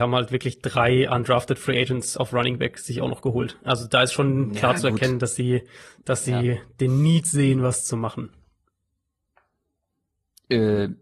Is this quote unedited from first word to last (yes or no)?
yes